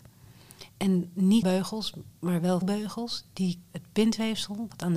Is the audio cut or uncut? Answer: cut